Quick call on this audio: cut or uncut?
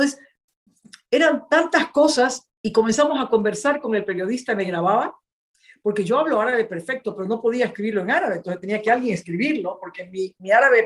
uncut